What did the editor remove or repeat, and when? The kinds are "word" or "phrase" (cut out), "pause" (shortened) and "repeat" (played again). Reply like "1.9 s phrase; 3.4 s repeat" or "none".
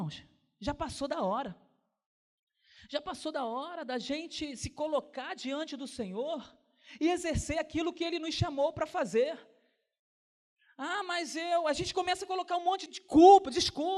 12.9 s word